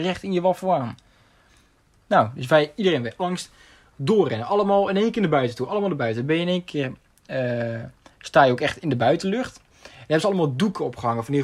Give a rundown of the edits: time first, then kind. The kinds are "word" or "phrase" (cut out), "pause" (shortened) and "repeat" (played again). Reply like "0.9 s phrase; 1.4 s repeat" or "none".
none